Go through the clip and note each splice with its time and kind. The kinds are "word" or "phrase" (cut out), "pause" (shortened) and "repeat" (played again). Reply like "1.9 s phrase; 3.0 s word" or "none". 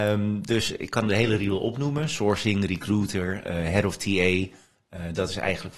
none